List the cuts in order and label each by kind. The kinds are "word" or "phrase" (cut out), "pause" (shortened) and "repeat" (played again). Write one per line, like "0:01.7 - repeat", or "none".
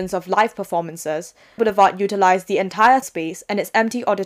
0:01.6 - word
0:03.0 - word